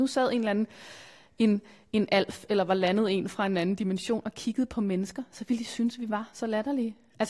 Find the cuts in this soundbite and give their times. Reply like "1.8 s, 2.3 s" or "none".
none